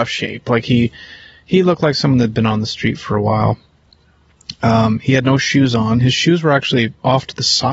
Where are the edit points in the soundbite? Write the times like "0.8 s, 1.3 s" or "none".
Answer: none

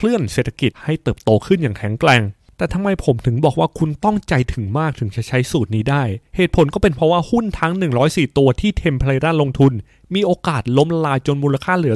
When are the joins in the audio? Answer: 6.3 s

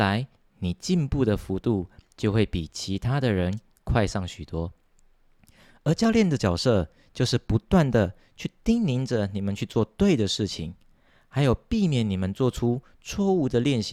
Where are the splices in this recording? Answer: none

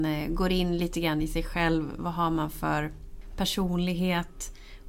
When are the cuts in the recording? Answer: none

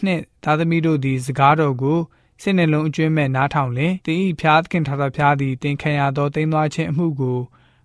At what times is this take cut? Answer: 4.0 s

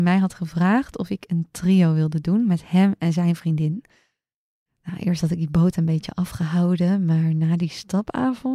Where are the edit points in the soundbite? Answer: none

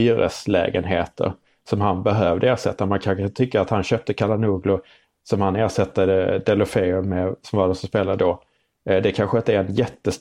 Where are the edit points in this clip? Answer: none

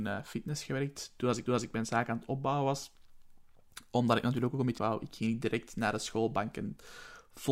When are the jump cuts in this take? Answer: 1.5 s, 4.8 s

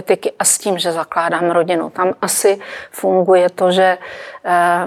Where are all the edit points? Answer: none

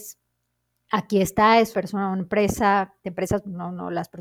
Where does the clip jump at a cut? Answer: 1.7 s, 3.0 s

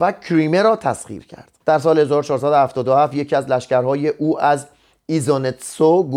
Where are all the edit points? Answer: 1.6 s

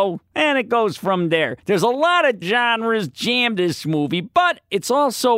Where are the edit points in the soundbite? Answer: 1.6 s, 2.4 s, 3.6 s

